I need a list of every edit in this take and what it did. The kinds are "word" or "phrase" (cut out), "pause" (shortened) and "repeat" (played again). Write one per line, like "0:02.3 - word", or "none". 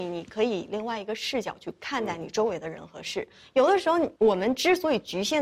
0:04.1 - pause